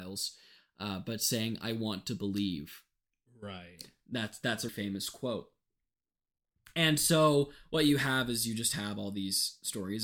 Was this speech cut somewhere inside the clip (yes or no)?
yes